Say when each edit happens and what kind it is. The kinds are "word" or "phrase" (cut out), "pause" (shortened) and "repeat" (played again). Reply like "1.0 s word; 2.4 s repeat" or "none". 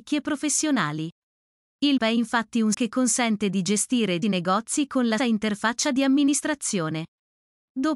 2.0 s word; 2.7 s word; 4.2 s word; 5.2 s word